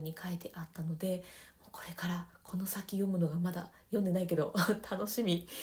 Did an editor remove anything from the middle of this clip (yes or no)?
no